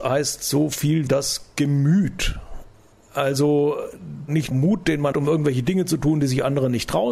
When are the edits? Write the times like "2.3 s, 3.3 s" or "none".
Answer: 1.1 s, 4.5 s, 5.1 s